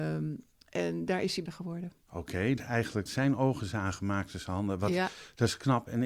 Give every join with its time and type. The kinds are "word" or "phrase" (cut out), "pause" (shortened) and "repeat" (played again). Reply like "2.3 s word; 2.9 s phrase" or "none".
1.5 s word; 2.0 s pause; 2.6 s word; 3.1 s word